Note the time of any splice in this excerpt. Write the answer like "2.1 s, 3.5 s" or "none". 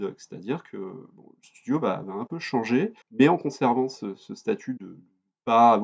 3.0 s